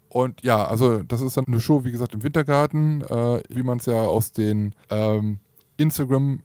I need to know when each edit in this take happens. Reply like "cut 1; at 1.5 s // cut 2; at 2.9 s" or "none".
cut 1; at 1.4 s // cut 2; at 3.5 s // cut 3; at 4.8 s